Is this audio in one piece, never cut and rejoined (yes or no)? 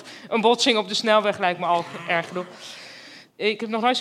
yes